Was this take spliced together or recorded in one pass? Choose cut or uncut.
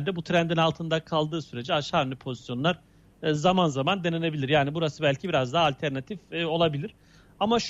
uncut